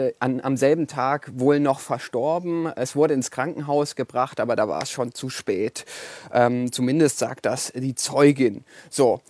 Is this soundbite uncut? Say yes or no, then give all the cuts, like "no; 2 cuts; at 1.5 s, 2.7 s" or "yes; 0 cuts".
yes; 0 cuts